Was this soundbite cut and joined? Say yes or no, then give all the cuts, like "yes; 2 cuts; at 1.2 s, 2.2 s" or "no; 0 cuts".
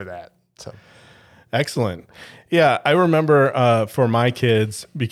no; 0 cuts